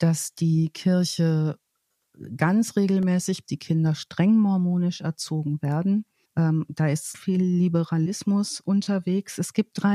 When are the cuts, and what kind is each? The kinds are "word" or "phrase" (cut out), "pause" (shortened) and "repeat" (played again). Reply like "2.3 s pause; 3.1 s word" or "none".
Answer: 3.5 s phrase; 6.3 s pause; 7.1 s phrase